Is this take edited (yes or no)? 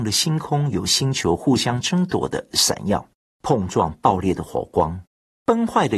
no